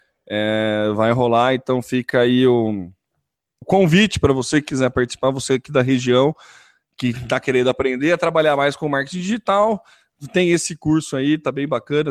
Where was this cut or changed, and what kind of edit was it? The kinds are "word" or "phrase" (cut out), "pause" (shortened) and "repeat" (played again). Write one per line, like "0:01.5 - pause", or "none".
0:03.6 - word

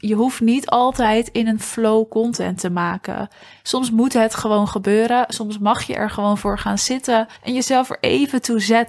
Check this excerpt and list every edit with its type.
0:07.4 - pause

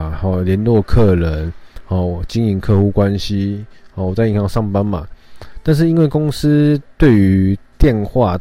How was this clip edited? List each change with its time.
none

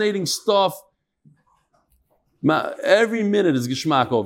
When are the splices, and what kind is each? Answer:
none

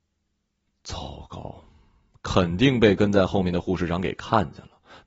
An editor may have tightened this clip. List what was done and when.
none

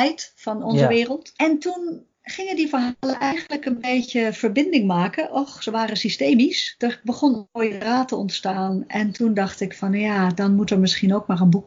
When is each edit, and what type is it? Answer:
0:02.1 - pause

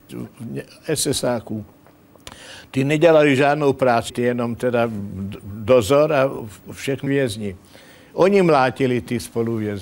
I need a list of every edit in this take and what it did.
0:04.1 - word
0:07.1 - word

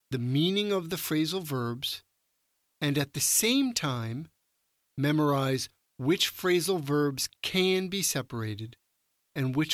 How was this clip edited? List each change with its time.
none

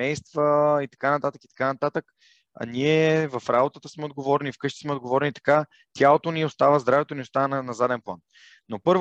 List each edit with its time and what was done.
none

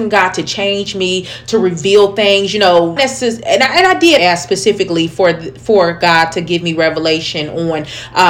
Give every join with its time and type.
0:03.0 - word
0:04.2 - word

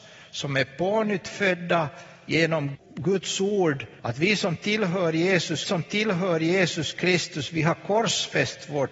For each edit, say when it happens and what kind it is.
0:02.7 - word
0:04.0 - pause
0:05.7 - repeat

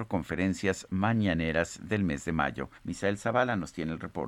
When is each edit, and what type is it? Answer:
0:02.7 - pause

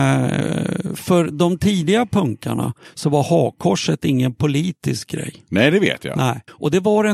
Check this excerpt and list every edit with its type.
none

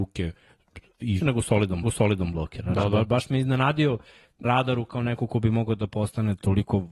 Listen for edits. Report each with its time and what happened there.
0:01.2 - word
0:01.8 - repeat
0:04.4 - phrase

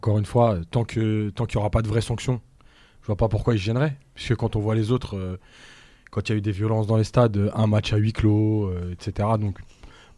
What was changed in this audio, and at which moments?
none

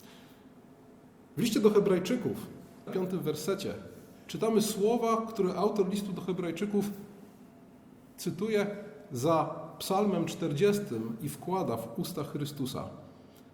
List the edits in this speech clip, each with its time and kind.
0:02.9 - phrase

